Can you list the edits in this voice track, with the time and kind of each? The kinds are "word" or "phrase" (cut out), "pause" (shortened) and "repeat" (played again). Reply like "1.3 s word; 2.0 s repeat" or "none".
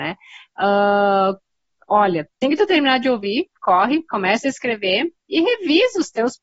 2.4 s word